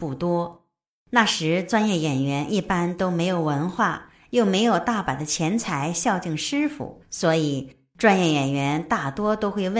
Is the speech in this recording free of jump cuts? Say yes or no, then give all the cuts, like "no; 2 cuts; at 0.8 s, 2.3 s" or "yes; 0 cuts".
no; 1 cut; at 7.0 s